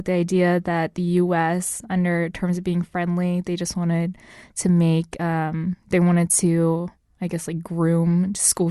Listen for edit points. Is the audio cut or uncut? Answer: uncut